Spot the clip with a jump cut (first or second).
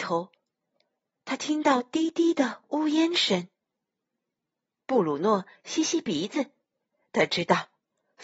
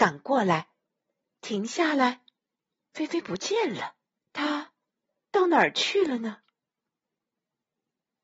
second